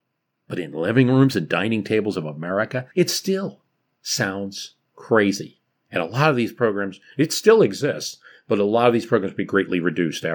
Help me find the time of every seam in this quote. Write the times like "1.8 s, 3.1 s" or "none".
2.9 s